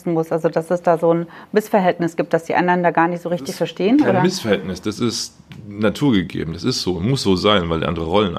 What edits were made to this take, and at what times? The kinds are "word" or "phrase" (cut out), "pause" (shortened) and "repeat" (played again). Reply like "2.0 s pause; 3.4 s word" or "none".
none